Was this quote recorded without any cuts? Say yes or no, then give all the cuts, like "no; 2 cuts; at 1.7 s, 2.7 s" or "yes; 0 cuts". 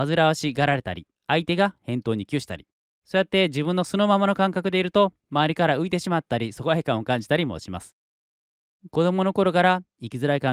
no; 3 cuts; at 1.1 s, 2.8 s, 5.2 s